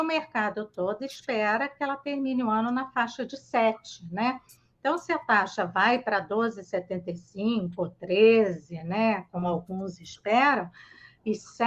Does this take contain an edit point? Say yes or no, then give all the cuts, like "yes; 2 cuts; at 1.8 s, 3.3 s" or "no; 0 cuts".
no; 0 cuts